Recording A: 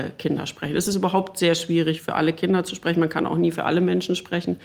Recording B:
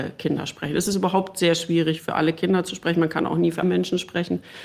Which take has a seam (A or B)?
B